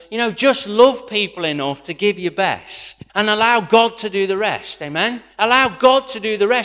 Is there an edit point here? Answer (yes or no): yes